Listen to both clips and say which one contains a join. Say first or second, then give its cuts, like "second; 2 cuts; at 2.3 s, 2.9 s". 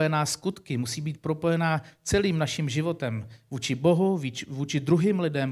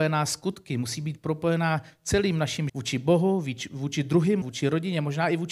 second; 2 cuts; at 2.7 s, 4.4 s